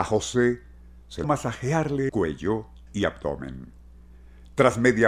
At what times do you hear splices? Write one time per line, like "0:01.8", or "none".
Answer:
0:01.2
0:02.1
0:02.9